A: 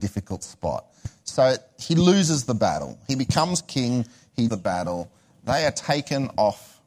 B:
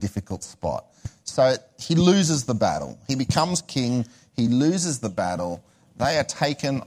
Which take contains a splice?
A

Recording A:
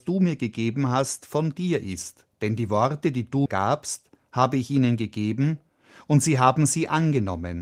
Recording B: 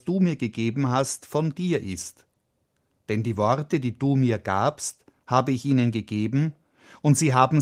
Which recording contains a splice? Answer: A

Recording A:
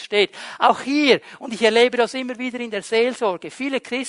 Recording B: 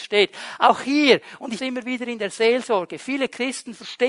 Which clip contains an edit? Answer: B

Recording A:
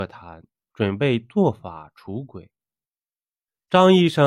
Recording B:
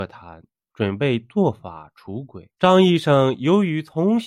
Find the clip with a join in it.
B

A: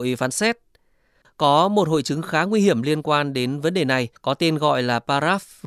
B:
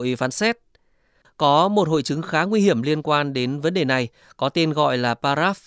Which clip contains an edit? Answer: A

